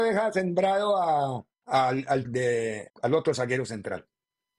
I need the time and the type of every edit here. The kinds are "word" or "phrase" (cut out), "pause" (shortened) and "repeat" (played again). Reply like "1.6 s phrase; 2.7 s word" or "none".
1.5 s pause; 2.2 s phrase; 2.9 s word